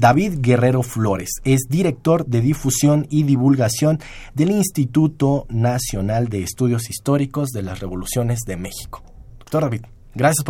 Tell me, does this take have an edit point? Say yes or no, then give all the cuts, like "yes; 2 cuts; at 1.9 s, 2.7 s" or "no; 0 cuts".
no; 0 cuts